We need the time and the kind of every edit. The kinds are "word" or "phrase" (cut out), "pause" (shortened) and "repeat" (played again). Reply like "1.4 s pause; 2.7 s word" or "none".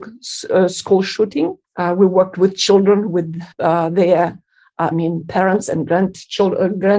1.6 s pause; 3.5 s pause; 4.9 s phrase